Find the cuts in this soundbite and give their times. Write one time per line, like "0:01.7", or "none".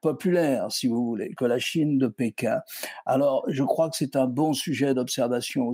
none